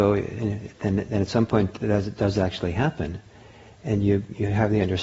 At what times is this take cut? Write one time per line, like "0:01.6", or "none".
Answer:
none

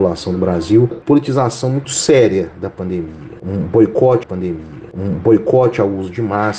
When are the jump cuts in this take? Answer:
0:00.9
0:01.8
0:04.2

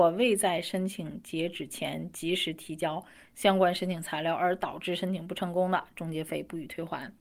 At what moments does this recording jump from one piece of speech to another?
none

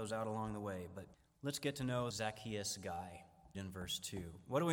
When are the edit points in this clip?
0:01.1
0:02.1
0:03.5

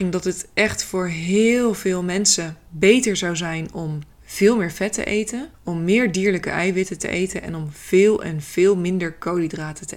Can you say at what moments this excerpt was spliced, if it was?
0:02.7
0:04.1
0:05.5

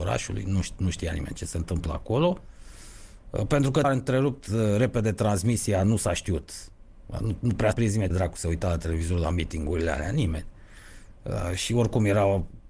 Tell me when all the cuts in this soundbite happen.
0:03.8
0:07.7
0:08.1

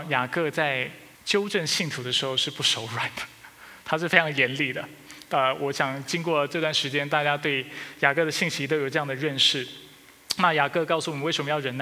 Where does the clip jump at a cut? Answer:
0:01.1

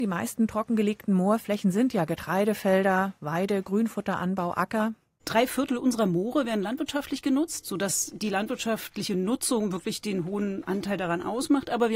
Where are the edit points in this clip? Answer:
none

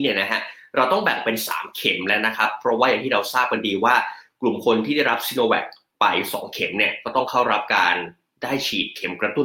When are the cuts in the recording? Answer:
none

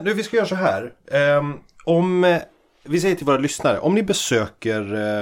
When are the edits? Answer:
none

